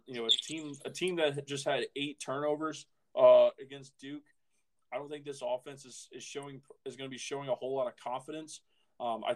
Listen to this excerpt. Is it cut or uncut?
uncut